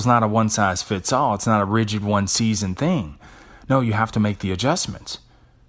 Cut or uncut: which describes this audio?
uncut